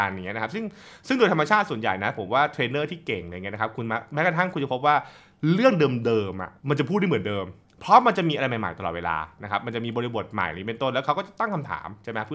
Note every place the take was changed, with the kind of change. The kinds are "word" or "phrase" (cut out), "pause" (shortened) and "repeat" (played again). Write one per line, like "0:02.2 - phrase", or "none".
0:06.6 - pause
0:07.7 - pause

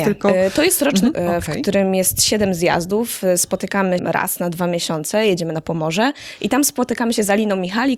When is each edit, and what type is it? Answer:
0:01.1 - word
0:04.0 - word

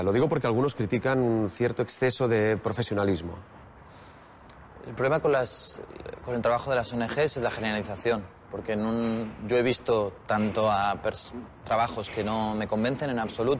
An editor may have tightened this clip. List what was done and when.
0:10.2 - pause

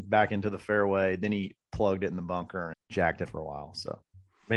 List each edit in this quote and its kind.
0:02.7 - word
0:03.2 - word

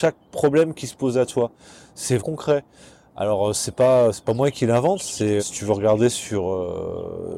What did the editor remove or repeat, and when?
0:02.2 - word
0:05.4 - word

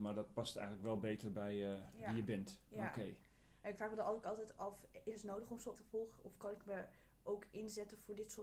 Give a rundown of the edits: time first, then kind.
0:05.8 - word

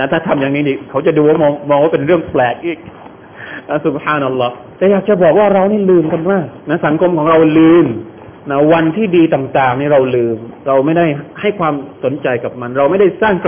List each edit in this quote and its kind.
0:04.7 - pause
0:06.6 - pause
0:08.4 - pause

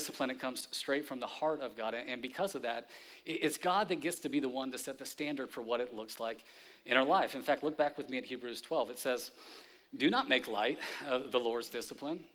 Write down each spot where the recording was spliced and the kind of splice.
none

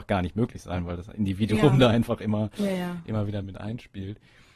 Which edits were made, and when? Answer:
none

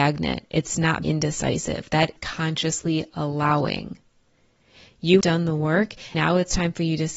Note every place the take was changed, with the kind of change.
0:01.0 - word
0:02.2 - word
0:05.2 - word
0:06.1 - word

